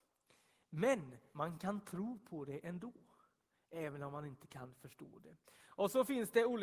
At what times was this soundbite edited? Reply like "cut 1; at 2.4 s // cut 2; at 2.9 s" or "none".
none